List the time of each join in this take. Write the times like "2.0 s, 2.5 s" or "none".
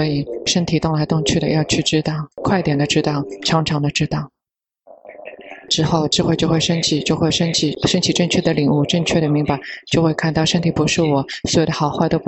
2.3 s